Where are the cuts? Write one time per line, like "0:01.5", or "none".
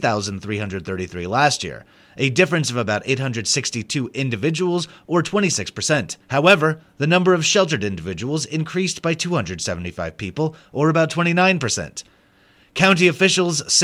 0:06.2